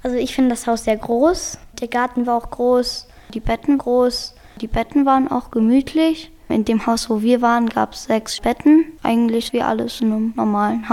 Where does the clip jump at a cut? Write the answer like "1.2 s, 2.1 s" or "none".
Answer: 3.8 s